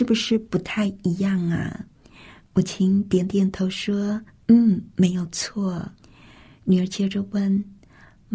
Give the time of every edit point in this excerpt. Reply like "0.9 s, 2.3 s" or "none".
1.9 s, 4.3 s, 6.0 s